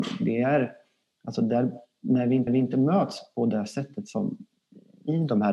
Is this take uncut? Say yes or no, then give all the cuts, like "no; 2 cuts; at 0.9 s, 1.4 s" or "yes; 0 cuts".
no; 1 cut; at 2.5 s